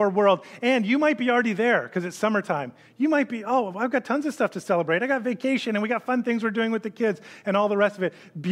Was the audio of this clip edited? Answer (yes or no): no